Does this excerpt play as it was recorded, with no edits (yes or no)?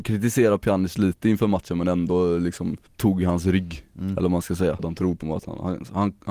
no